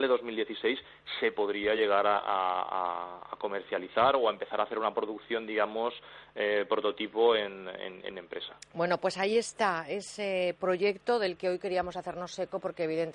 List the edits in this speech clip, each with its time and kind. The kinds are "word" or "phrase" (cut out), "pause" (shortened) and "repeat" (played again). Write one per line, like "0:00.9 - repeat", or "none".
none